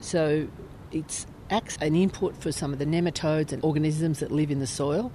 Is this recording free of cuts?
no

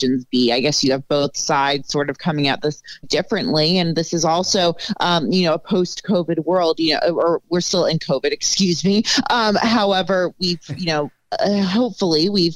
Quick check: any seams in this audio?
yes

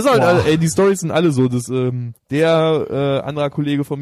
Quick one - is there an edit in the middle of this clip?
yes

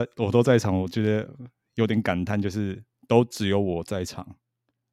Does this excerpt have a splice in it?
no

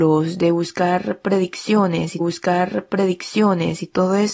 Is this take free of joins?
no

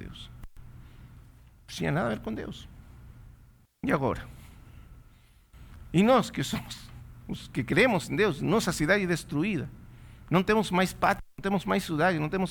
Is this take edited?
yes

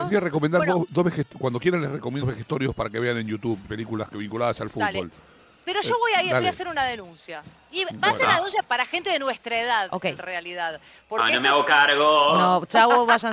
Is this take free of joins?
no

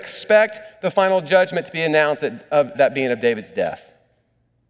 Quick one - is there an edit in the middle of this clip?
yes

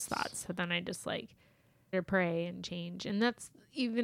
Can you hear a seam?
yes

